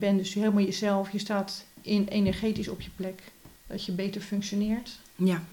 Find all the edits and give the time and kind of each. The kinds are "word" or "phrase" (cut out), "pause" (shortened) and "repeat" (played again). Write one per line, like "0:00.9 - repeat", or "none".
0:03.5 - pause